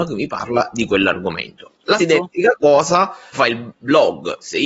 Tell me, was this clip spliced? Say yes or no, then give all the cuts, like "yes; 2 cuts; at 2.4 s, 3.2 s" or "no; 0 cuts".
yes; 2 cuts; at 2.0 s, 3.3 s